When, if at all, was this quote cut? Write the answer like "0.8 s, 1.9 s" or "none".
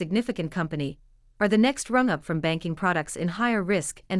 none